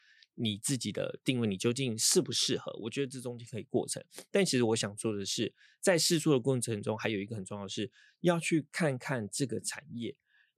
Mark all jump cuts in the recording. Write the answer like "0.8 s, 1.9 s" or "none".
none